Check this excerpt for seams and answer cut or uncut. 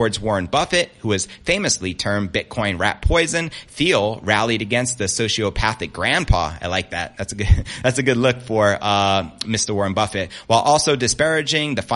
uncut